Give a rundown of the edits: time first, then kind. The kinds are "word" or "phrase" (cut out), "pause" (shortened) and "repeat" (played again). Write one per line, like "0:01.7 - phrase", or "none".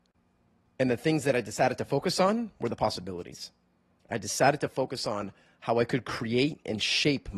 none